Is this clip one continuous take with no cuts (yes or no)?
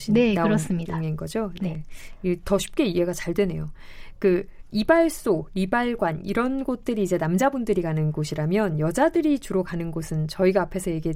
yes